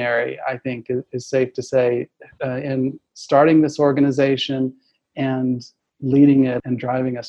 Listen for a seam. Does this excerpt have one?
no; 0 cuts

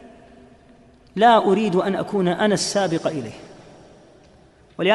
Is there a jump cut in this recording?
no; 0 cuts

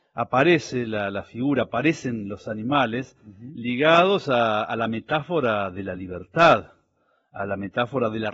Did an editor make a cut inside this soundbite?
no; 0 cuts

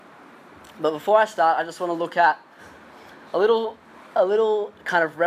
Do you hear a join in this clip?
no; 0 cuts

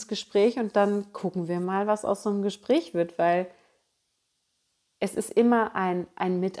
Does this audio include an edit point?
no; 0 cuts

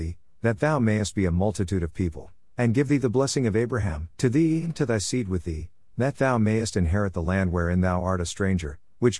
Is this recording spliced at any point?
yes; 1 cut; at 4.1 s

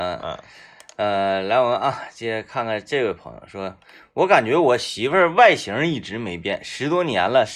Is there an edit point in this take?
no; 0 cuts

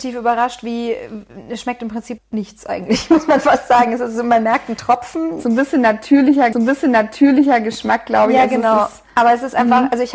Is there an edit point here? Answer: yes; 2 cuts; at 2.2 s, 6.5 s

